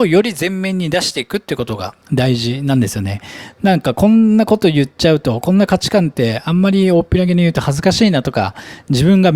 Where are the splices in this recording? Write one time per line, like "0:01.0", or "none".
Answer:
0:02.0